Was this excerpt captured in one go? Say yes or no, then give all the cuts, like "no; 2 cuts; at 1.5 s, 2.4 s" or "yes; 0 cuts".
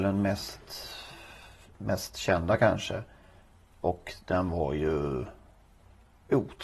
yes; 0 cuts